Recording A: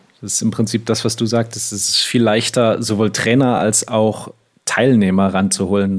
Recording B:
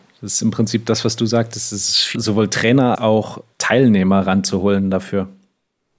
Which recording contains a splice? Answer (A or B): B